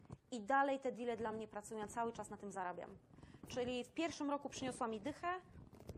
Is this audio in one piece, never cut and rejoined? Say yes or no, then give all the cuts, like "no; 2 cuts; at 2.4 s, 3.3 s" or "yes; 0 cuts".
yes; 0 cuts